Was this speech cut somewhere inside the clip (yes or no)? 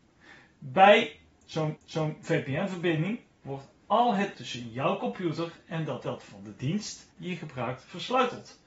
yes